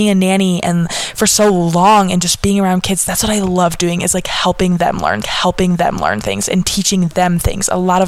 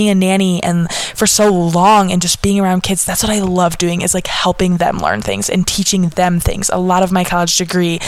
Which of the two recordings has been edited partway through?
first; 1 cut; at 5.2 s

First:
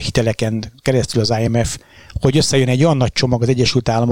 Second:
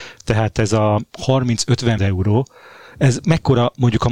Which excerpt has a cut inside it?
second; 1 cut; at 2.0 s

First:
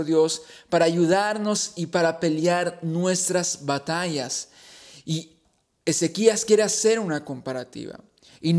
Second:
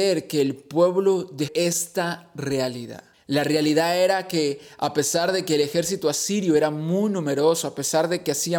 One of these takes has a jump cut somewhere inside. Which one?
second; 2 cuts; at 1.5 s, 3.1 s

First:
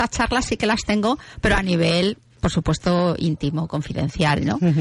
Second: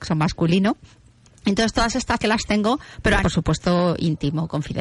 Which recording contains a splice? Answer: second; 2 cuts; at 2.2 s, 3.2 s

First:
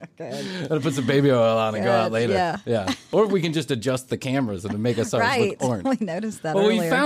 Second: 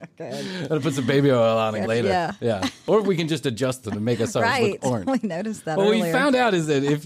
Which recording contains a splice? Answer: second; 2 cuts; at 1.8 s, 3.8 s

